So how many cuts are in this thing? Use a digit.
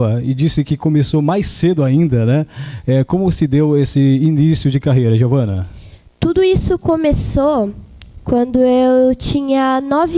0